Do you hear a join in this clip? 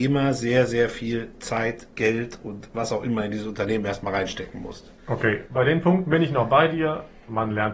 yes; 1 cut; at 5.0 s

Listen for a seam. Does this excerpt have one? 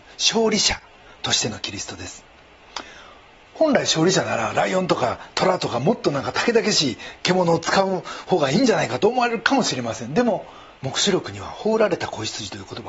yes; 1 cut; at 10.8 s

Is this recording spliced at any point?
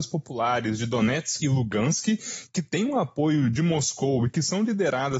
yes; 1 cut; at 1.4 s

